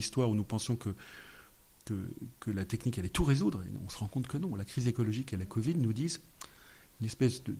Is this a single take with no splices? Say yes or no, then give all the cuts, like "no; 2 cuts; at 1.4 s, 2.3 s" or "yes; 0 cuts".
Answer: yes; 0 cuts